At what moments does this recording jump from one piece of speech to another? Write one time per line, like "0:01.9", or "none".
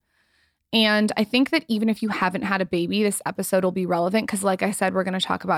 none